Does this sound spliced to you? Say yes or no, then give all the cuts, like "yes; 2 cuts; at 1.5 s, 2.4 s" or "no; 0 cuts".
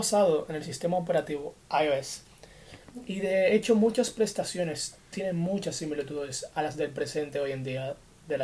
no; 0 cuts